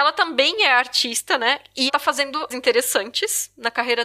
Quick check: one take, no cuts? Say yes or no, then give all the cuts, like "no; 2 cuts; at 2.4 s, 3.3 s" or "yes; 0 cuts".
no; 2 cuts; at 1.9 s, 2.5 s